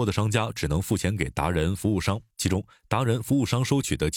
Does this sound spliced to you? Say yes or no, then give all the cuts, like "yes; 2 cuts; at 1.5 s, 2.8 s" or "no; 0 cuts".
yes; 1 cut; at 2.3 s